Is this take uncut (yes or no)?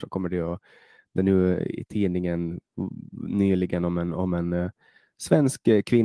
no